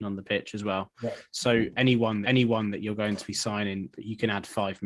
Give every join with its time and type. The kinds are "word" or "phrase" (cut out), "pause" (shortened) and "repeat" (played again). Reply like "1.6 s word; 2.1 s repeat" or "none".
2.2 s repeat; 3.9 s phrase